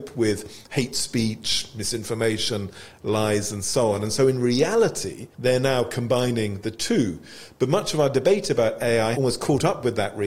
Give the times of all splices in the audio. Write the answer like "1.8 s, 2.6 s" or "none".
5.3 s, 9.1 s